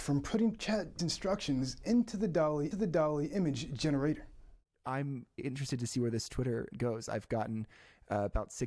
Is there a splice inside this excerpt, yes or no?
yes